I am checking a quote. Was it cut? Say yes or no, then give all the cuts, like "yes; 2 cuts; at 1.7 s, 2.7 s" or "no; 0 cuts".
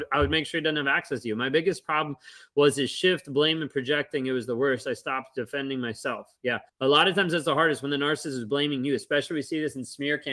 yes; 1 cut; at 6.7 s